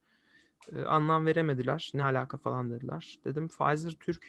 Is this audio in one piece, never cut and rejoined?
yes; 0 cuts

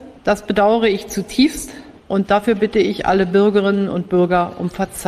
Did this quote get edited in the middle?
no; 0 cuts

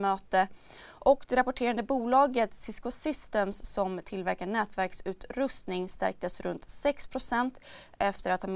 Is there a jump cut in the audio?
no; 0 cuts

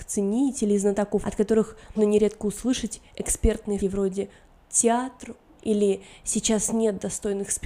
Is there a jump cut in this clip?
yes; 4 cuts; at 1.2 s, 1.9 s, 3.8 s, 5.6 s

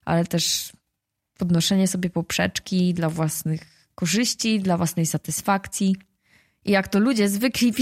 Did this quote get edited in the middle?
no; 0 cuts

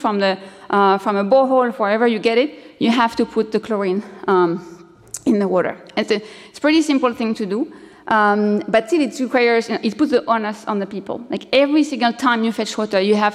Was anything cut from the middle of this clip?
no; 0 cuts

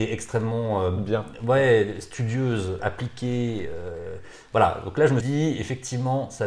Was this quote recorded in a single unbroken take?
no; 2 cuts; at 2.8 s, 5.2 s

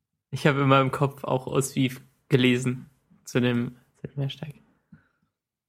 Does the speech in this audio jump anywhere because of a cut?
no; 0 cuts

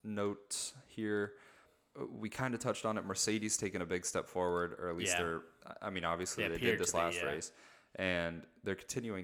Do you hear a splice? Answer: no; 0 cuts

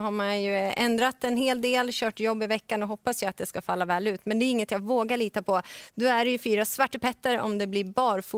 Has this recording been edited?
no; 0 cuts

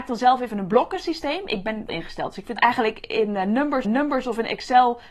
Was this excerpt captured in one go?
no; 3 cuts; at 1.9 s, 2.6 s, 3.8 s

